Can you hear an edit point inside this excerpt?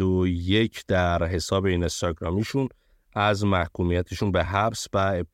no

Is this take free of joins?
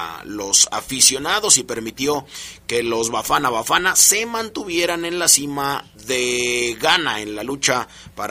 no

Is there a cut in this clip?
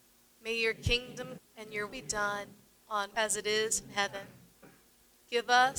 yes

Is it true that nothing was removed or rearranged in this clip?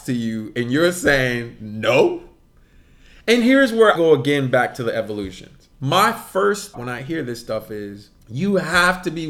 no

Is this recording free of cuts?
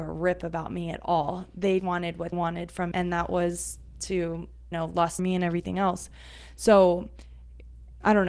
no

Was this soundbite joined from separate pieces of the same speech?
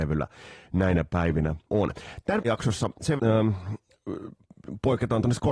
yes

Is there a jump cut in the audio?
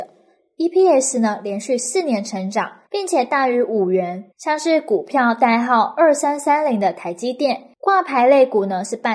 yes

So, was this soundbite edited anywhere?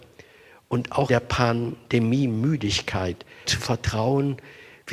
yes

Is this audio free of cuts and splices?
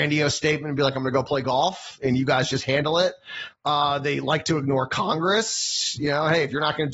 yes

